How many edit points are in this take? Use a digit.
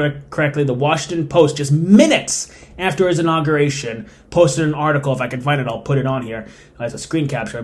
0